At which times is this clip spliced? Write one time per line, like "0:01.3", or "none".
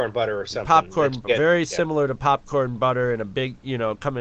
none